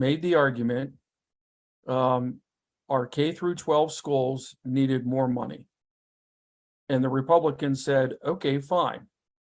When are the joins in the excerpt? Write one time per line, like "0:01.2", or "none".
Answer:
none

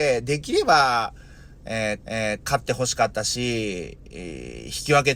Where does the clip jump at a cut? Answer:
0:02.0

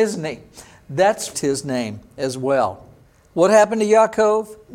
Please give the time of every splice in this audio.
0:01.3

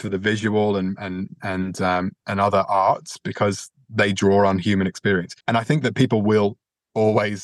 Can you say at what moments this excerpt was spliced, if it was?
0:05.4

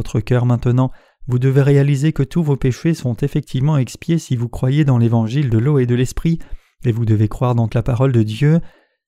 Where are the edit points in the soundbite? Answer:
0:07.7

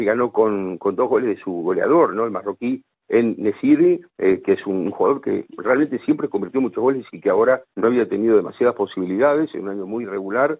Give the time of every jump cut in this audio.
0:04.1
0:07.7

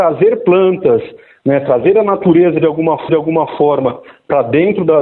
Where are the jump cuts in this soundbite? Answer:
0:03.1

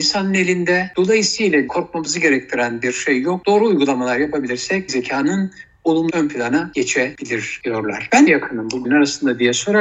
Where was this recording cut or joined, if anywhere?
0:01.7
0:04.9
0:06.1
0:08.3
0:08.8

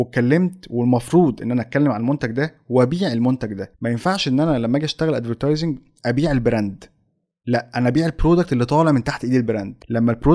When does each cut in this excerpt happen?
none

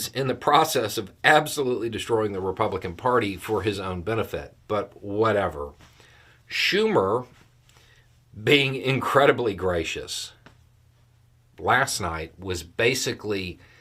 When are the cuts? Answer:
none

